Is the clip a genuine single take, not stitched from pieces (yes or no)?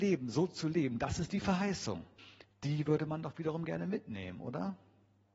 no